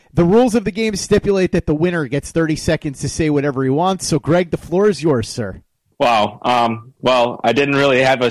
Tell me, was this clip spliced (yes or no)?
no